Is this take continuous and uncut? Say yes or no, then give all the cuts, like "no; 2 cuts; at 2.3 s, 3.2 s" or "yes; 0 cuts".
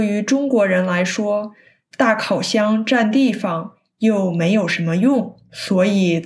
yes; 0 cuts